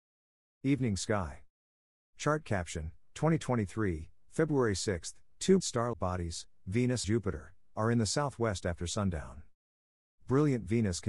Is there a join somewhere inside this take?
yes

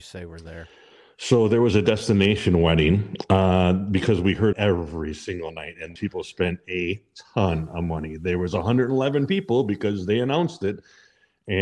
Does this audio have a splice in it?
yes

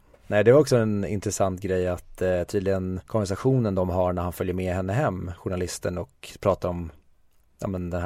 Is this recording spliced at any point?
yes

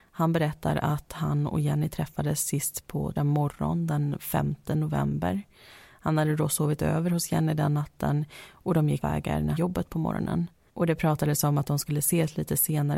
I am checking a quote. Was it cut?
yes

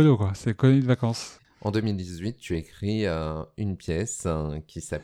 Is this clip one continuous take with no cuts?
yes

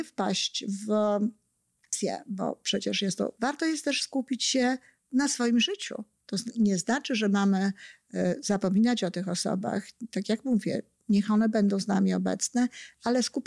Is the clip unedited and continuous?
no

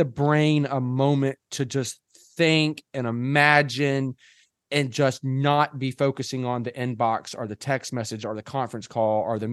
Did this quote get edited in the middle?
no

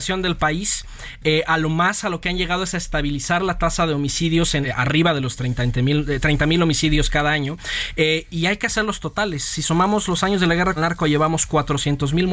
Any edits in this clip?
yes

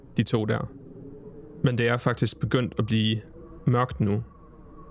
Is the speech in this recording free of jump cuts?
yes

